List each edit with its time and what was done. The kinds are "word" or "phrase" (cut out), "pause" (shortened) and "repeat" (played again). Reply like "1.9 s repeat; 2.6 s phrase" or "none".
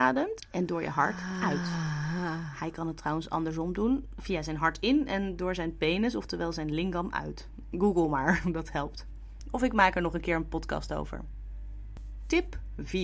none